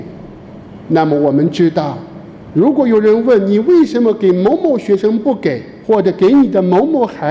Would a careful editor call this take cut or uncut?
cut